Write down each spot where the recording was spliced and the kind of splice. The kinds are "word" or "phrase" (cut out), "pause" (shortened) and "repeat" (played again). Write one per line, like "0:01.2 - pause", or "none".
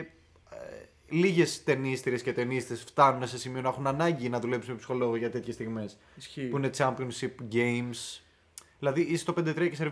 none